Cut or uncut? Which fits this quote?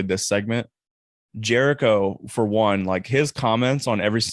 uncut